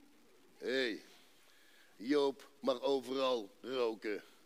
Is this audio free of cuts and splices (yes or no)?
yes